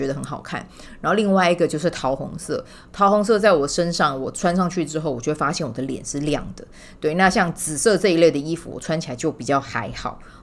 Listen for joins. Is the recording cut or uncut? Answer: uncut